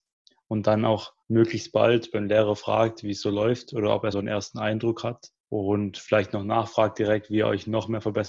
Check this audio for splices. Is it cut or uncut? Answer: cut